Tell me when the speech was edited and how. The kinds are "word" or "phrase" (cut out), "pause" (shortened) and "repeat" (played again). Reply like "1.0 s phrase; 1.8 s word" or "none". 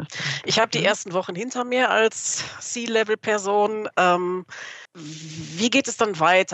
4.9 s pause